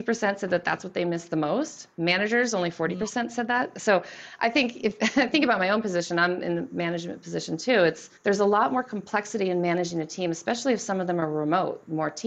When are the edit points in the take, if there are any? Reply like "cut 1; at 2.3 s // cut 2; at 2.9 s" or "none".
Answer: cut 1; at 8.2 s